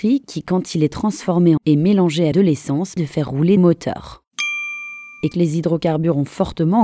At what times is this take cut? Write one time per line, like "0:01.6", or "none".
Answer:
0:01.6
0:02.3
0:03.0
0:03.6
0:05.3